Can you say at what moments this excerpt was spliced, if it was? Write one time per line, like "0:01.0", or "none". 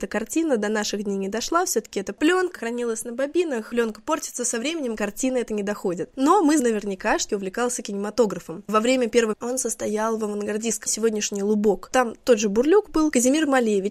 0:02.6
0:05.0
0:06.6
0:07.3
0:08.7
0:09.3
0:10.9